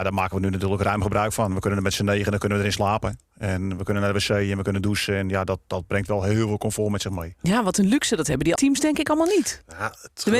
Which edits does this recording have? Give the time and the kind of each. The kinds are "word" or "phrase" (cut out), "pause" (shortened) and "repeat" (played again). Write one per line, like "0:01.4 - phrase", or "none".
0:08.6 - word